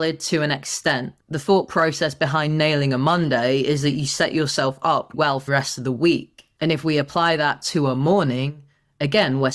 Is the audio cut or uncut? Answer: cut